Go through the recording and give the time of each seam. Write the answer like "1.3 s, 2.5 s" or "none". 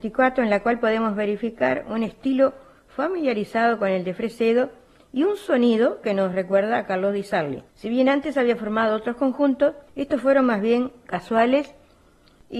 7.7 s, 9.9 s